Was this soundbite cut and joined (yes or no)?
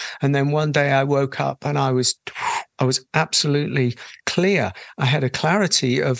yes